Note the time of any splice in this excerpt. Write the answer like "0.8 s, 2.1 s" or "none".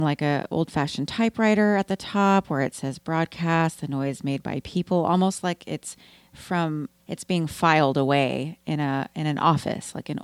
7.0 s